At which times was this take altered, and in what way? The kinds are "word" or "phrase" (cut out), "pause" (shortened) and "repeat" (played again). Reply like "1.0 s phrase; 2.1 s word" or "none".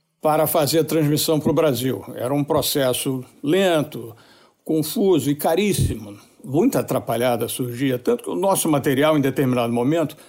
none